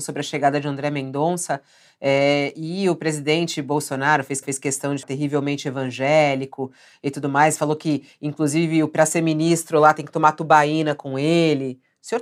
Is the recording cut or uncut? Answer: cut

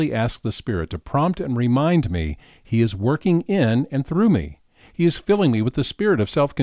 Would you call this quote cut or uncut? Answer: uncut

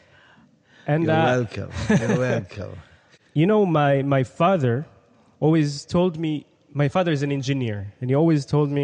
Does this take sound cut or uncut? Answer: uncut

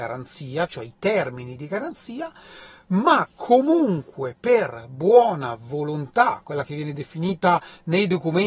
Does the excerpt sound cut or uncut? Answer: uncut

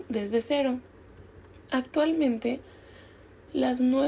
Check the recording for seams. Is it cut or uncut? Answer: cut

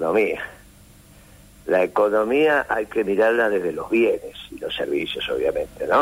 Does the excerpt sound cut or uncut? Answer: uncut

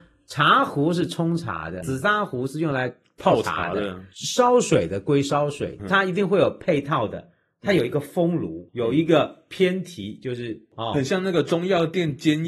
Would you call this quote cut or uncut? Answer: cut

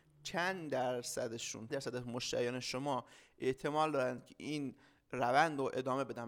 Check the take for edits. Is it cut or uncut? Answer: cut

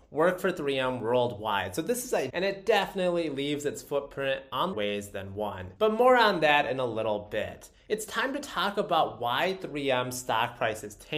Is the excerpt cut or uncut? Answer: cut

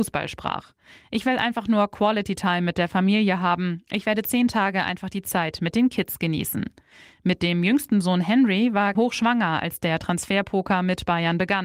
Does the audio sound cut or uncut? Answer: cut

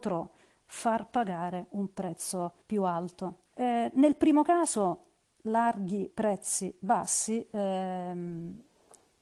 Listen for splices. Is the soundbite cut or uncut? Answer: cut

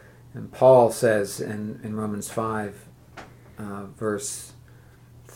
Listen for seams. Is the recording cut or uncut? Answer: uncut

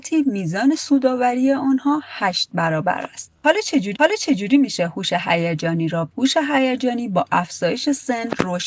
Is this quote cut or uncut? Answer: cut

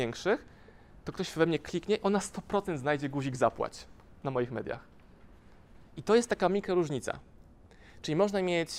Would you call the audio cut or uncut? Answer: uncut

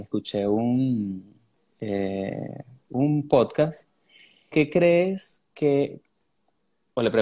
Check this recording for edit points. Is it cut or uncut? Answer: cut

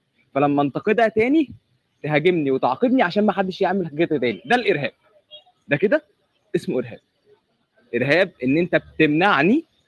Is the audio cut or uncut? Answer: uncut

